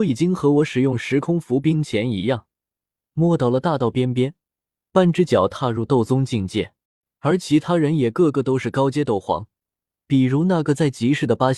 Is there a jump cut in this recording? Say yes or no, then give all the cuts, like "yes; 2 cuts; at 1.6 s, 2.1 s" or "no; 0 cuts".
yes; 1 cut; at 6.9 s